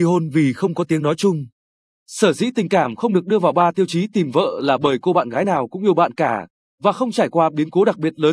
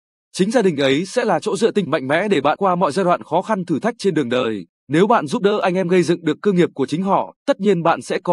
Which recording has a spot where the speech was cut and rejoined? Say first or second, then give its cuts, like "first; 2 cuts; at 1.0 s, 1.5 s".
second; 4 cuts; at 1.9 s, 2.6 s, 4.7 s, 7.4 s